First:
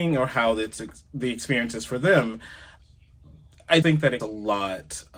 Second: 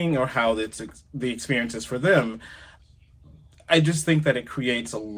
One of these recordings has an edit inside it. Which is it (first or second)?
first